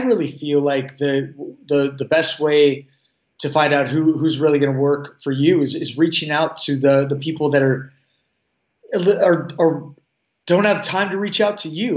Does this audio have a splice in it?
no; 0 cuts

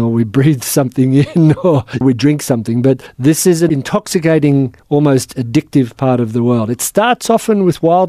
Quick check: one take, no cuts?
yes; 0 cuts

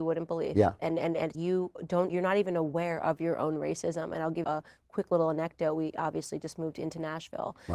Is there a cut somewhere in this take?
yes; 3 cuts; at 1.3 s, 2.1 s, 4.4 s

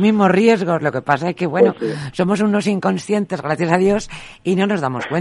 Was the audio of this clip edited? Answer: no; 0 cuts

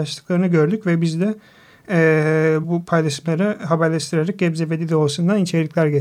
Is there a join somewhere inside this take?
no; 0 cuts

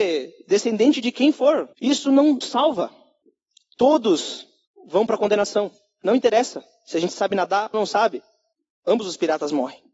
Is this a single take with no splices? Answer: no; 3 cuts; at 1.7 s, 2.4 s, 7.7 s

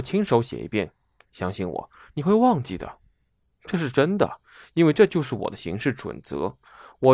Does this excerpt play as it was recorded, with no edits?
yes; 0 cuts

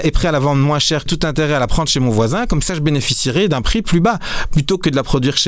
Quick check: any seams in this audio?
yes; 1 cut; at 1.1 s

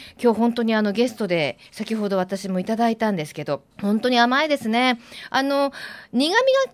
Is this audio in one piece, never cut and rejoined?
no; 2 cuts; at 1.7 s, 3.7 s

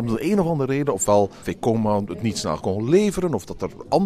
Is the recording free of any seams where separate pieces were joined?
no; 2 cuts; at 1.4 s, 2.6 s

